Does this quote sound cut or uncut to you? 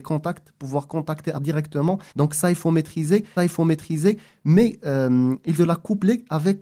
cut